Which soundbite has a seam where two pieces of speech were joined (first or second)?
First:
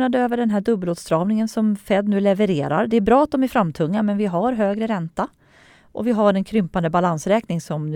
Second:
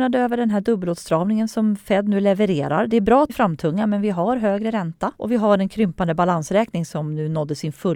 second